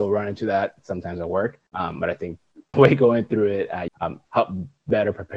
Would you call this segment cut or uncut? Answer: cut